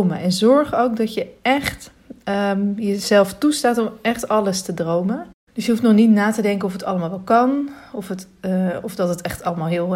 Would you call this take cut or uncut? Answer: uncut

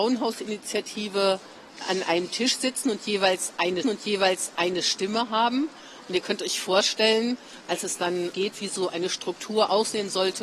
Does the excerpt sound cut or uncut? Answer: cut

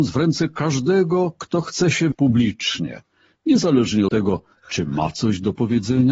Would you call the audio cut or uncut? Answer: cut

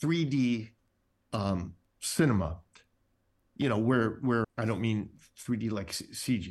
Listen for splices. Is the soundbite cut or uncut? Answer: cut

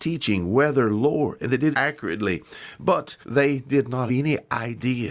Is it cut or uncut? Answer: cut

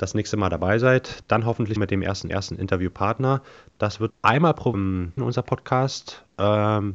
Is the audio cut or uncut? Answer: cut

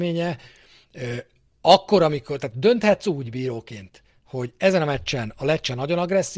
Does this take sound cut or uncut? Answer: uncut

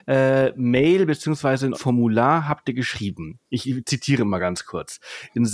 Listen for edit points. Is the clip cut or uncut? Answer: cut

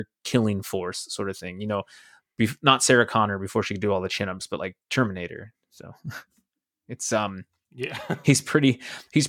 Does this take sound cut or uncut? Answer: uncut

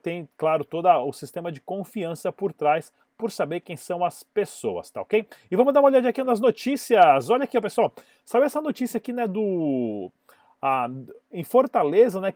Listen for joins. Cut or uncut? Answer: uncut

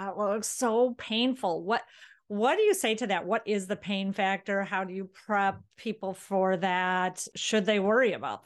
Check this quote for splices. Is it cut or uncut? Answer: uncut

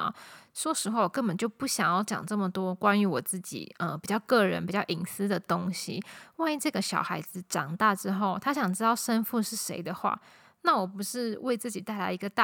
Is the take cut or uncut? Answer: uncut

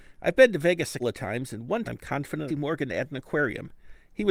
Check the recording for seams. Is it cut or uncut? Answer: cut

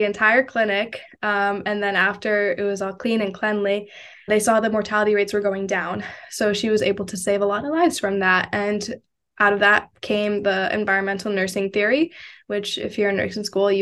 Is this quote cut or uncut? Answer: cut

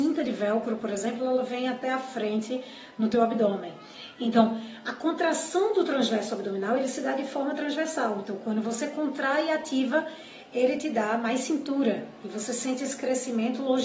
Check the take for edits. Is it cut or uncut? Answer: uncut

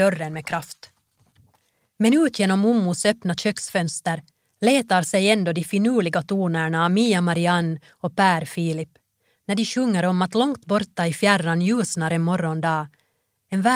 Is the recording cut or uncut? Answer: uncut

